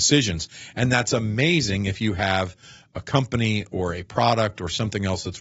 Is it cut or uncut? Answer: uncut